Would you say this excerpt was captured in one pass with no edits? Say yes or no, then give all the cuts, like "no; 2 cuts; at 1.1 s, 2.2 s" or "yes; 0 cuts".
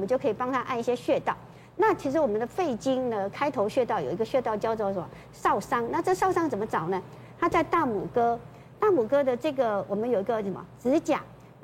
yes; 0 cuts